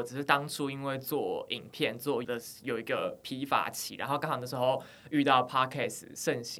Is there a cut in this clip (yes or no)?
yes